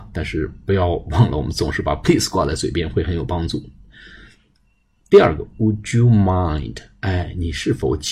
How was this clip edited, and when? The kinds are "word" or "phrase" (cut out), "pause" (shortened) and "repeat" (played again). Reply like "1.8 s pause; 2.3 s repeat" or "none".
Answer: none